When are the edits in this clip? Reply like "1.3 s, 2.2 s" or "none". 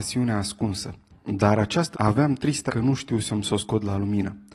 1.1 s, 1.9 s, 2.7 s